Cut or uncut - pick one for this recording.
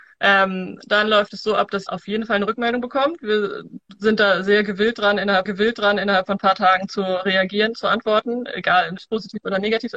cut